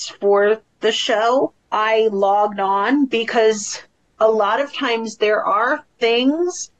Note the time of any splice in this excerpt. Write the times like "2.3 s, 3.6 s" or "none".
1.6 s